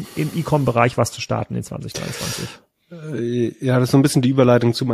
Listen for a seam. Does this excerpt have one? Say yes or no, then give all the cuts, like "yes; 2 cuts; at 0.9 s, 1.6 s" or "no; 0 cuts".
no; 0 cuts